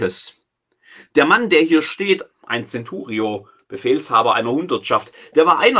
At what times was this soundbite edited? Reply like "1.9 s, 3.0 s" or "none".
none